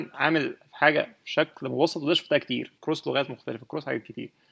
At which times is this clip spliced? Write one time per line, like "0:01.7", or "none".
0:02.8